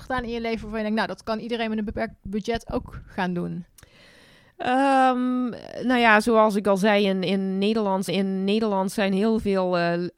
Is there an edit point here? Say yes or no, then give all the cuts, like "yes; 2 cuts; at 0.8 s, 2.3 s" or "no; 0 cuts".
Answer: yes; 1 cut; at 8.1 s